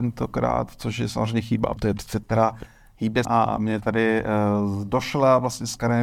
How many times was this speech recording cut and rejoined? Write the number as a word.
three